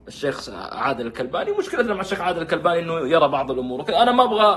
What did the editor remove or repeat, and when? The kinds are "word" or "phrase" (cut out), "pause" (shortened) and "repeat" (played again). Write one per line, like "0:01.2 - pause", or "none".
none